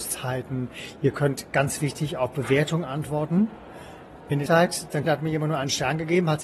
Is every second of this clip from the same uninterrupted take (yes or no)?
no